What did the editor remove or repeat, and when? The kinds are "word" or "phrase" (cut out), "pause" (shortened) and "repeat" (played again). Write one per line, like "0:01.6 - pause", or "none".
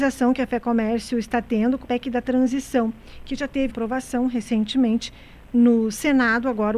0:01.8 - phrase
0:03.7 - word